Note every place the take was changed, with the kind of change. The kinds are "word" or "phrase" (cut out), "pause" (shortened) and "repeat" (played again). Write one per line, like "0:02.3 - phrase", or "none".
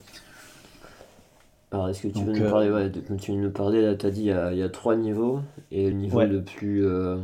0:05.9 - word